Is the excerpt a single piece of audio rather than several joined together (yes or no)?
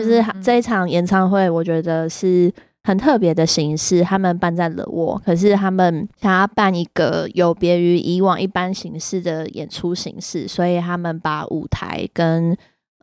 yes